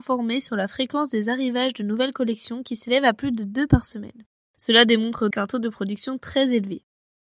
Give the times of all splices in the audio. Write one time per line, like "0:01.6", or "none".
0:04.4
0:05.3